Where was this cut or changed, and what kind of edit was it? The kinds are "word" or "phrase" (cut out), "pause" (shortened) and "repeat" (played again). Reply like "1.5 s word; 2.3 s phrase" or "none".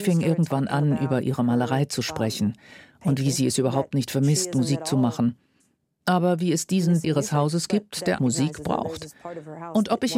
7.0 s word; 8.2 s word